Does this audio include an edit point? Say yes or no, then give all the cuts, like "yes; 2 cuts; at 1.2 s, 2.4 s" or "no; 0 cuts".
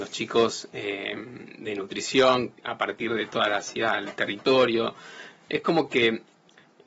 yes; 1 cut; at 2.6 s